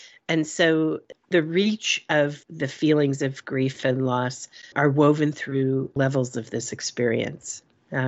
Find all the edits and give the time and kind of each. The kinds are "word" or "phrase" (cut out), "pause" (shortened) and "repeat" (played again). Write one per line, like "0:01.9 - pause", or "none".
0:02.4 - pause
0:04.7 - word
0:06.0 - word